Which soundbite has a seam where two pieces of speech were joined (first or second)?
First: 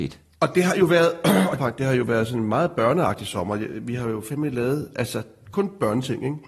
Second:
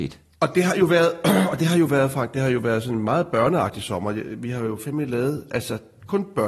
first